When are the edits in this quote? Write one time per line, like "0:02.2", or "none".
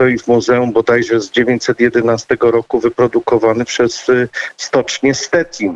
none